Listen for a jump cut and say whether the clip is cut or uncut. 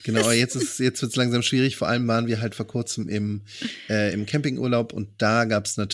uncut